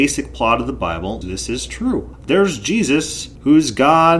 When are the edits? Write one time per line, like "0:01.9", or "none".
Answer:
0:01.2